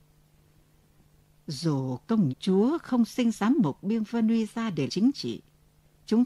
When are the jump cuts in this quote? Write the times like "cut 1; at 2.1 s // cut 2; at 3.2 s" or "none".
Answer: cut 1; at 2.3 s // cut 2; at 4.9 s